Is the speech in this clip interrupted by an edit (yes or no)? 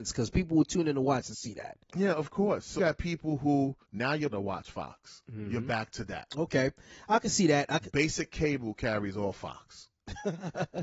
yes